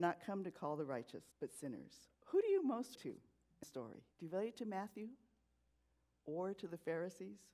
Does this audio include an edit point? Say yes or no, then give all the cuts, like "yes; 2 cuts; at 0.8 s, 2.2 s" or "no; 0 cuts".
yes; 5 cuts; at 1.3 s, 2.1 s, 2.9 s, 3.6 s, 4.1 s